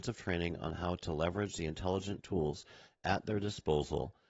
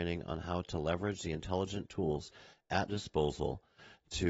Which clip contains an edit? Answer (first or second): second